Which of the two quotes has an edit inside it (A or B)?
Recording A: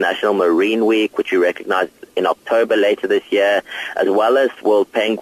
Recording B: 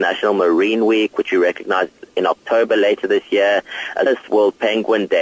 B